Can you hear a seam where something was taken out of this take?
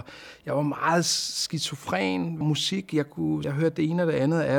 yes; 2 cuts; at 2.4 s, 3.4 s

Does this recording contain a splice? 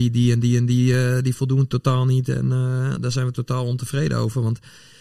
no; 0 cuts

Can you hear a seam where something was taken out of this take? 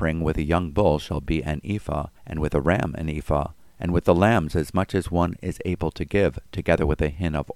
yes; 1 cut; at 2.2 s

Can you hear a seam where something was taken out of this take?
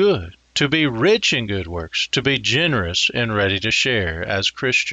no; 0 cuts

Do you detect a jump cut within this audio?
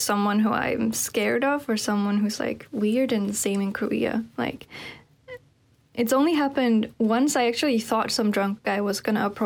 no; 0 cuts

